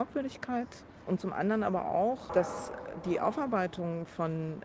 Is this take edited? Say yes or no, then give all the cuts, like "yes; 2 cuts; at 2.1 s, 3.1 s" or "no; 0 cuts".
no; 0 cuts